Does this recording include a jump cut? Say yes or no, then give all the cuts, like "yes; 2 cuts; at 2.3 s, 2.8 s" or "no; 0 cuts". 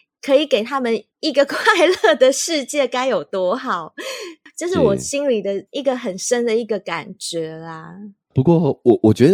yes; 1 cut; at 8.2 s